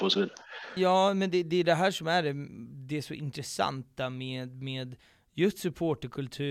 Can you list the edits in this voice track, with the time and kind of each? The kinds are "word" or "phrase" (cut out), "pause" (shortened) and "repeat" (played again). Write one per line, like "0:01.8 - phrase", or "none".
none